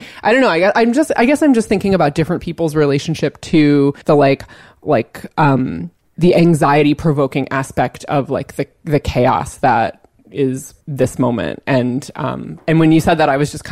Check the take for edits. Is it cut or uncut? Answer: cut